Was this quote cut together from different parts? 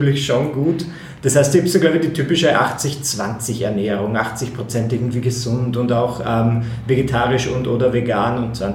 no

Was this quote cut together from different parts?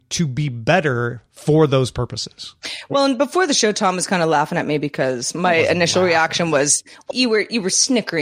yes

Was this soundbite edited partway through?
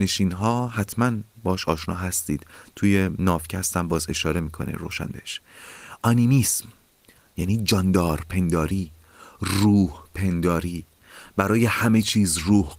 no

